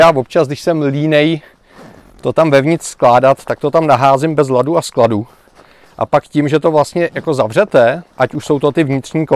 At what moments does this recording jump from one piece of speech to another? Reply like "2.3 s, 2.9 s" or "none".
none